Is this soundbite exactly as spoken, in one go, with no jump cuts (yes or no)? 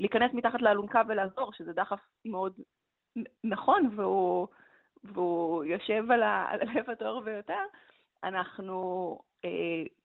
yes